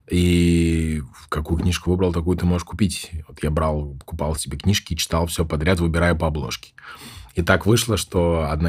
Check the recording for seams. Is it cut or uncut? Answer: uncut